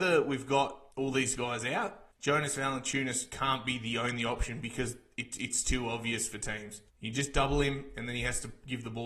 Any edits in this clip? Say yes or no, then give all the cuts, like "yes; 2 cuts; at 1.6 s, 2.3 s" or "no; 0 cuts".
yes; 3 cuts; at 0.9 s, 2.1 s, 6.9 s